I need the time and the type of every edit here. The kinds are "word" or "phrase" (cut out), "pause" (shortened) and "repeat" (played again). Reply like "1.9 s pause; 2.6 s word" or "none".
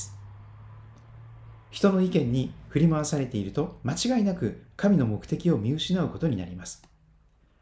1.6 s pause; 3.8 s pause